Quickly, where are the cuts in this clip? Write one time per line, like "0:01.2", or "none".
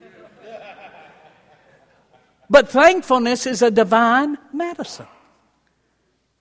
none